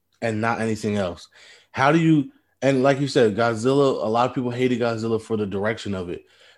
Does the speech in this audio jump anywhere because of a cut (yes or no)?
no